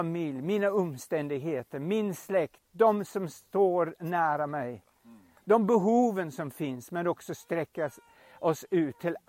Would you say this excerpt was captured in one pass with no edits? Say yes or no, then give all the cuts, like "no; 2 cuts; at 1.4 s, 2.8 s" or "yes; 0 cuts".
yes; 0 cuts